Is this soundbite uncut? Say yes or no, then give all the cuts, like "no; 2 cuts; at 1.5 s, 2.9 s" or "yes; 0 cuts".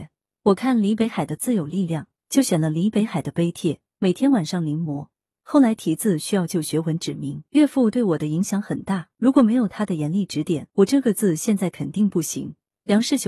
no; 3 cuts; at 7.5 s, 9.1 s, 10.7 s